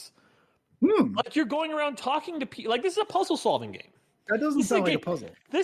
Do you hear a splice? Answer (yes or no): no